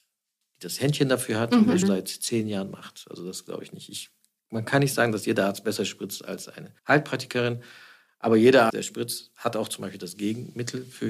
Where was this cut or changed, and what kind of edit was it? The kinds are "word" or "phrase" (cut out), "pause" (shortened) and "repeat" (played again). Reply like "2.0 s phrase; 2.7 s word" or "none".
1.8 s word; 6.8 s pause; 8.7 s word